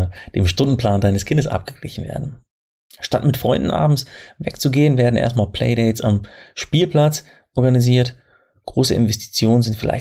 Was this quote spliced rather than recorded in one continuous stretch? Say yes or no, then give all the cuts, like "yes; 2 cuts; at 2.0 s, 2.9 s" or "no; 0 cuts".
no; 0 cuts